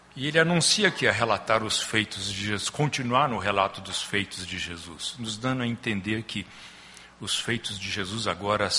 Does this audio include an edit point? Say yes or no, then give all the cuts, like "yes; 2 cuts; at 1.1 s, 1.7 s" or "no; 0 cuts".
no; 0 cuts